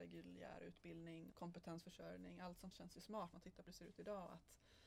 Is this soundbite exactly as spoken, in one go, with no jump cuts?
no; 4 cuts; at 1.3 s, 2.7 s, 3.3 s, 3.7 s

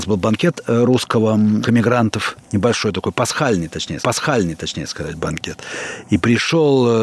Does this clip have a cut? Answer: yes; 2 cuts; at 1.6 s, 4.0 s

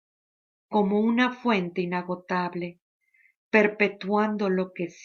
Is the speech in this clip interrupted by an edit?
no; 0 cuts

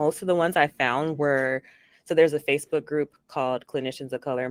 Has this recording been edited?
no; 0 cuts

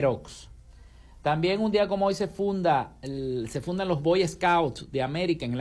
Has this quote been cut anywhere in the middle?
no; 0 cuts

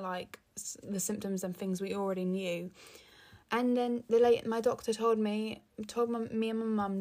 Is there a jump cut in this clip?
yes; 1 cut; at 3.4 s

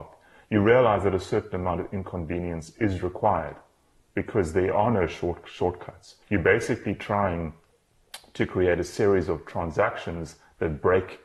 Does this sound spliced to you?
yes; 1 cut; at 6.2 s

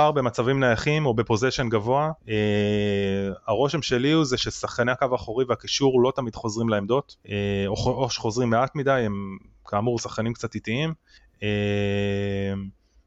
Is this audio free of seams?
no; 2 cuts; at 2.2 s, 7.2 s

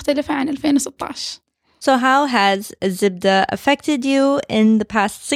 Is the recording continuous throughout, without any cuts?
yes; 0 cuts

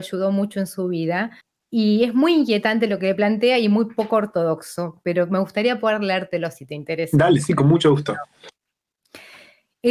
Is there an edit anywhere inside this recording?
yes; 1 cut; at 1.4 s

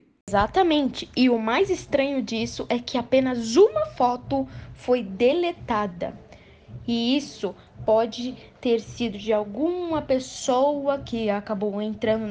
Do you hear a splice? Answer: no; 0 cuts

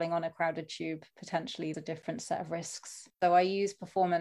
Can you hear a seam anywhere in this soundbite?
yes; 2 cuts; at 1.7 s, 3.1 s

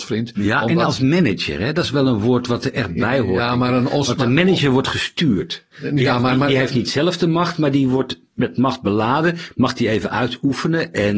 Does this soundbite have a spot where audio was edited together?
yes; 1 cut; at 5.7 s

